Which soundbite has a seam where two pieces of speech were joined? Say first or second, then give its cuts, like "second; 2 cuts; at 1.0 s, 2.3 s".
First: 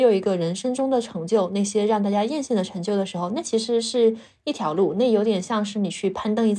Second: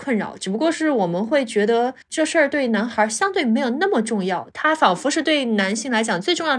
second; 1 cut; at 2.0 s